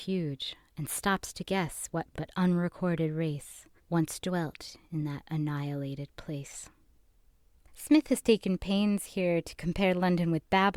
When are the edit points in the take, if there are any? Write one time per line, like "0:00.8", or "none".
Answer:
0:02.1
0:03.8
0:07.0